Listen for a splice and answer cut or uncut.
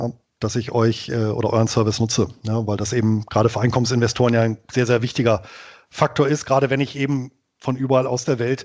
uncut